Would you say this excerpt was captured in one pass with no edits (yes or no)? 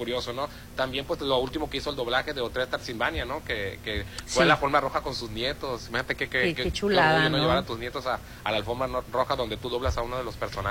yes